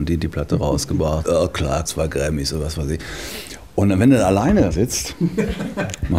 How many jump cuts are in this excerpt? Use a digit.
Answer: 3